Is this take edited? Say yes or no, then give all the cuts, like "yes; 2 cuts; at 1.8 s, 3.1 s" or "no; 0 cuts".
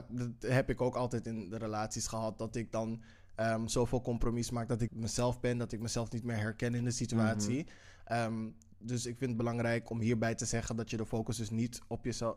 yes; 1 cut; at 4.9 s